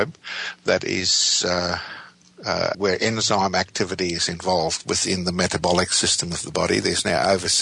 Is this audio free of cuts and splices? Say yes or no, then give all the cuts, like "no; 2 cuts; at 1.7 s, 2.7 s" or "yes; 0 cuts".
no; 1 cut; at 2.7 s